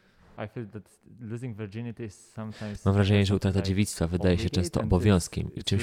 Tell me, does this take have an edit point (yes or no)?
no